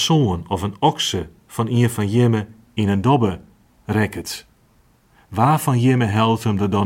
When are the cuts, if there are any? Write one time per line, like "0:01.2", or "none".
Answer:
none